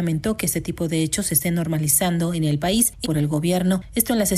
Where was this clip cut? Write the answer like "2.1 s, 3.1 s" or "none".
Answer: 3.0 s